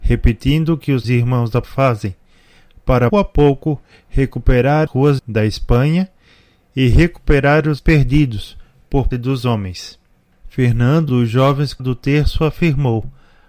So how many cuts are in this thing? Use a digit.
9